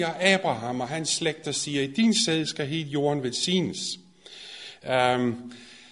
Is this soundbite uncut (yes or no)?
yes